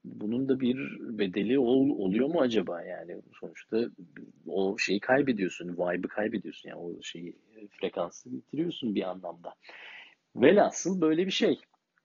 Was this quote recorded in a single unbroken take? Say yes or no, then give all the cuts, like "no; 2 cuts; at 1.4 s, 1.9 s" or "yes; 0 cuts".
yes; 0 cuts